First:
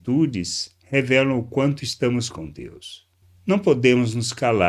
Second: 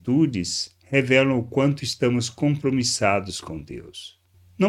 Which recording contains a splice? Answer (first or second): first